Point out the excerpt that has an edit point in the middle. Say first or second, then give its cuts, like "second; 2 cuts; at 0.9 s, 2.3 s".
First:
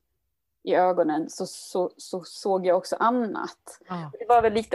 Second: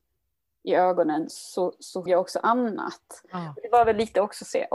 second; 2 cuts; at 1.3 s, 2.1 s